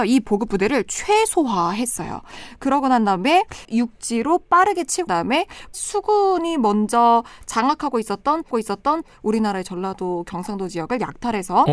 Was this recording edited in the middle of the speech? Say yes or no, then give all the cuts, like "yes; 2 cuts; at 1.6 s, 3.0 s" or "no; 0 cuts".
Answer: yes; 3 cuts; at 3.6 s, 5.1 s, 8.5 s